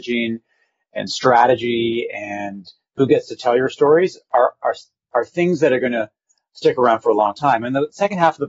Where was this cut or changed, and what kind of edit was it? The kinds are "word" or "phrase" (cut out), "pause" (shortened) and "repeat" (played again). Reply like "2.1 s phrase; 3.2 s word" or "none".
none